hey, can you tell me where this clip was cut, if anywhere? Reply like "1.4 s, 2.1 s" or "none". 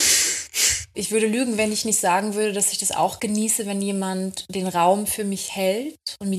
0.9 s